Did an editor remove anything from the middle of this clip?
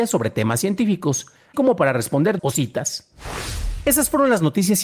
yes; 2 cuts; at 1.5 s, 2.4 s

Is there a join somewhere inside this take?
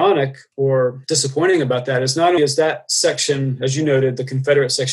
yes; 1 cut; at 2.4 s

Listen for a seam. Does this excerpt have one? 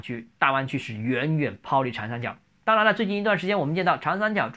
yes; 1 cut; at 2.5 s

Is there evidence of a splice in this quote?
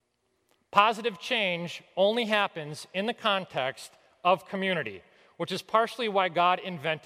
no; 0 cuts

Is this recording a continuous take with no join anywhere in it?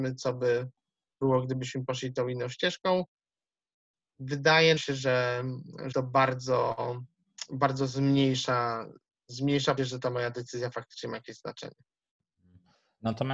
no; 3 cuts; at 4.8 s, 5.9 s, 9.8 s

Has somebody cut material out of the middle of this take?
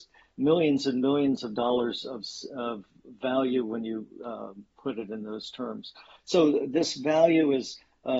no; 0 cuts

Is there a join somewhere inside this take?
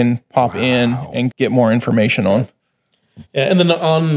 yes; 2 cuts; at 1.3 s, 3.3 s

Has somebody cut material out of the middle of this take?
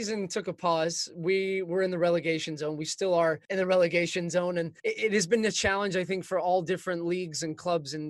yes; 2 cuts; at 3.4 s, 4.8 s

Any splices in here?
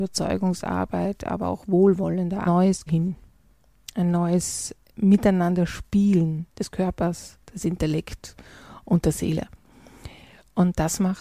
yes; 4 cuts; at 2.5 s, 2.9 s, 6.5 s, 7.4 s

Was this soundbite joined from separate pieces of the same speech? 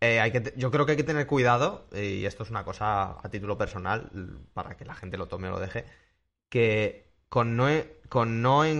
no; 0 cuts

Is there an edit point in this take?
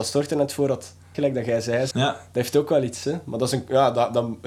yes; 2 cuts; at 1.1 s, 1.9 s

